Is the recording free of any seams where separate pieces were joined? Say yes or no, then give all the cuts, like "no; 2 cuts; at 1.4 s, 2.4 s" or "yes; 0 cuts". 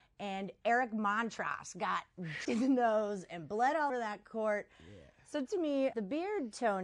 no; 4 cuts; at 2.4 s, 3.9 s, 5.5 s, 5.9 s